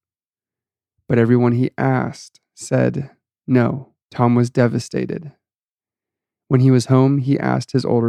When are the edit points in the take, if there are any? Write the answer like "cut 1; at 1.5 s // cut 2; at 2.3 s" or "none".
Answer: cut 1; at 4.0 s